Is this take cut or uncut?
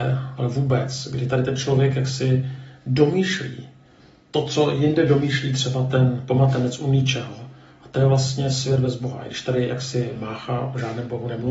uncut